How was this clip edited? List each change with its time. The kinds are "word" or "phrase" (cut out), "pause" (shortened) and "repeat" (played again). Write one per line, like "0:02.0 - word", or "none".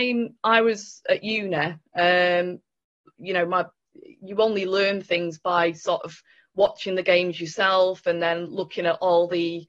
none